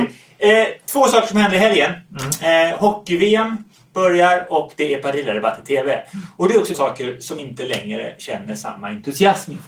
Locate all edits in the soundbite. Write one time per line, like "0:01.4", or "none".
0:06.7
0:07.4